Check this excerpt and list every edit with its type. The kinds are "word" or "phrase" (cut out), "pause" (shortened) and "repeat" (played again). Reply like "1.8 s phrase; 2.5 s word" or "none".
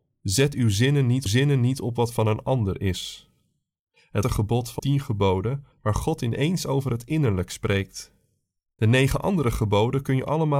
1.3 s repeat; 4.2 s word; 4.8 s word; 5.7 s pause